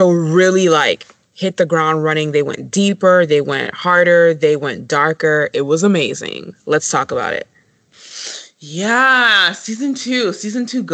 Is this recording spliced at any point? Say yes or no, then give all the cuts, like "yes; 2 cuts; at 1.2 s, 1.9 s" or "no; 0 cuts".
no; 0 cuts